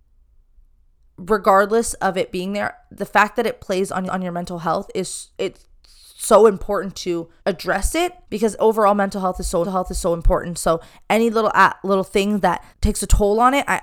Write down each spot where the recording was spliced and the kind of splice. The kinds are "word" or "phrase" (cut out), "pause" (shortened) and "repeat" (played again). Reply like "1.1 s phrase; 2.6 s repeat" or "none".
4.1 s repeat; 5.3 s pause; 7.4 s pause; 8.2 s pause; 9.6 s repeat; 12.7 s pause